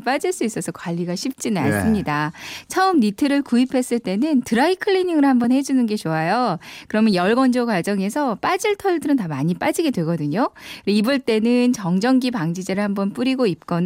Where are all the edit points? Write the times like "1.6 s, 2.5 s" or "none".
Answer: none